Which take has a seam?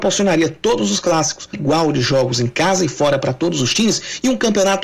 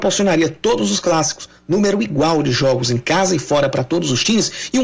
first; 1 cut; at 1.5 s

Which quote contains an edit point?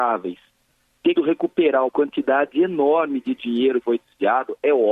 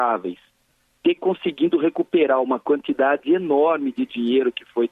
first; 3 cuts; at 1.1 s, 1.9 s, 3.8 s

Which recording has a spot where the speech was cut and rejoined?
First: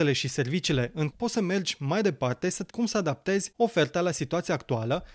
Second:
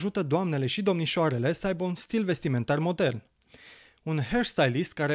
first; 2 cuts; at 1.1 s, 2.7 s

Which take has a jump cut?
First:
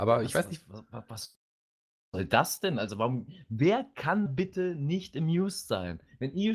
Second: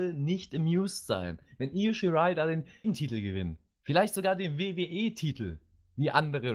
first; 1 cut; at 4.3 s

